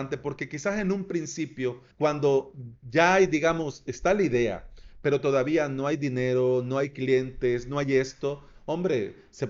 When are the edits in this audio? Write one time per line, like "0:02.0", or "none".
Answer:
0:01.9